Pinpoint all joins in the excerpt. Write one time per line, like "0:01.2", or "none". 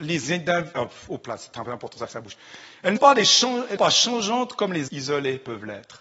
0:01.9
0:03.0
0:03.8
0:04.9